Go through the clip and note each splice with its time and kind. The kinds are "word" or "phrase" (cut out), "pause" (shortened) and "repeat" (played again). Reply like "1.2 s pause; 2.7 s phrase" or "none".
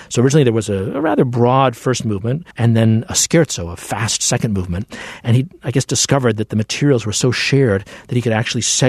2.5 s pause